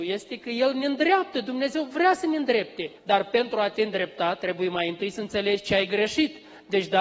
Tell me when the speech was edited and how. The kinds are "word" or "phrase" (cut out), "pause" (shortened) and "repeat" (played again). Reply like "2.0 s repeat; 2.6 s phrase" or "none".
3.0 s pause